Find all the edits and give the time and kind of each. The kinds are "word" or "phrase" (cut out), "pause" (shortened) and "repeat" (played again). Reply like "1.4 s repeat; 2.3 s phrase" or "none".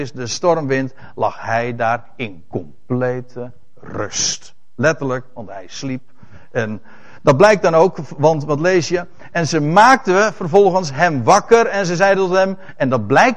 none